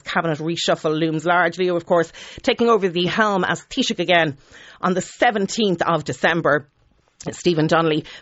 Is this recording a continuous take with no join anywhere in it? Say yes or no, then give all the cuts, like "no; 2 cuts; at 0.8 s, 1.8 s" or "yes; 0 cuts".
yes; 0 cuts